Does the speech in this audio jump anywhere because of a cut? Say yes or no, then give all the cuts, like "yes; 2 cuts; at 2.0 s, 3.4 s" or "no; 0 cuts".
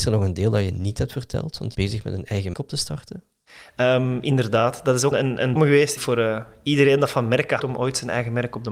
yes; 6 cuts; at 1.7 s, 2.5 s, 5.1 s, 5.6 s, 6.0 s, 7.6 s